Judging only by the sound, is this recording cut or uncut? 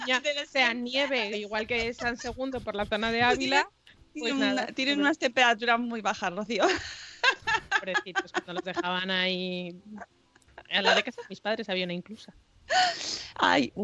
uncut